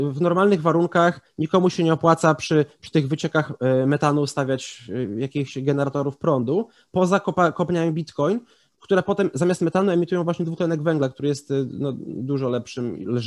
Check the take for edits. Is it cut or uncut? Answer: uncut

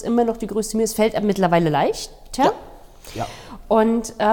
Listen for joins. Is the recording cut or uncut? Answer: uncut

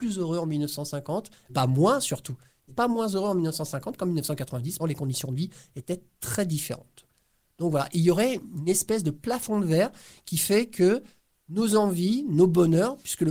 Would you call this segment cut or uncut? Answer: cut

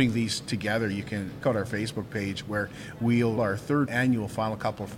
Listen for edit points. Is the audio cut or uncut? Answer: cut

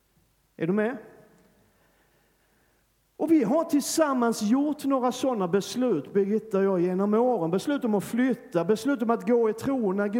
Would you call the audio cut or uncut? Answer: uncut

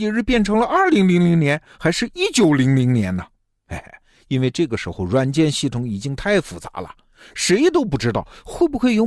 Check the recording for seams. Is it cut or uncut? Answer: uncut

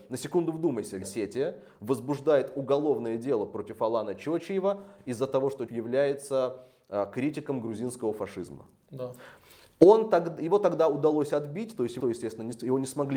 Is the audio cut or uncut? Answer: cut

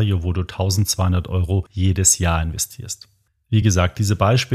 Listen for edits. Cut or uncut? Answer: uncut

